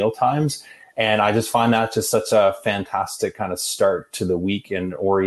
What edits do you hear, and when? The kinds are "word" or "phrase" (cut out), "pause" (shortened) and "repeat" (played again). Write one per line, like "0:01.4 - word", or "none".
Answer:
none